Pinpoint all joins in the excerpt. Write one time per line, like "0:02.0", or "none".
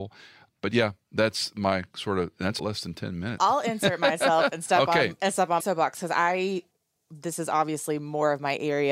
0:02.6
0:03.4
0:05.6